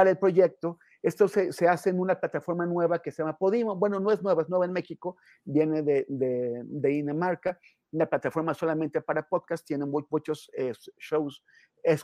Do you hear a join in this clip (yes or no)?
no